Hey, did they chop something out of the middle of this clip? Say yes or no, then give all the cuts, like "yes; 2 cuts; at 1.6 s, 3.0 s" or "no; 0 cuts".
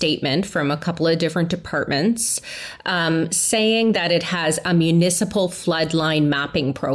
no; 0 cuts